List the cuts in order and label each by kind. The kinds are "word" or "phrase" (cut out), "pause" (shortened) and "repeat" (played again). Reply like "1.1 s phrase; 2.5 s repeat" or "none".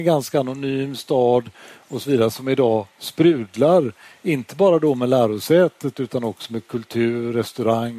none